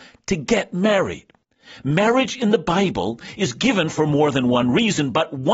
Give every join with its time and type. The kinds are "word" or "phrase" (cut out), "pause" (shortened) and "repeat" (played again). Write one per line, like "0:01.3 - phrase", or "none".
none